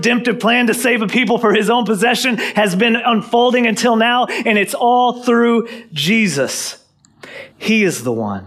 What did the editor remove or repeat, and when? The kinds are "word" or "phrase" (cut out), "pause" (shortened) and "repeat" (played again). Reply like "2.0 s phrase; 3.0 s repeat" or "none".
7.5 s pause